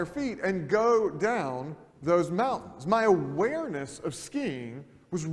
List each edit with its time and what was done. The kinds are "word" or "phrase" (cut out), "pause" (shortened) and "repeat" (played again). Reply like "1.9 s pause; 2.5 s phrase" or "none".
1.9 s pause